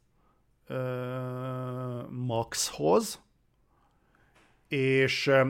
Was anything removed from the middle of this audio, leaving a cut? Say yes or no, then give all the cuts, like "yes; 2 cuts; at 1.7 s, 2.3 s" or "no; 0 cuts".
no; 0 cuts